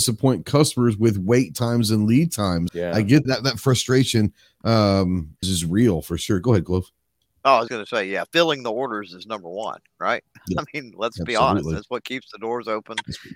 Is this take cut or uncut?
cut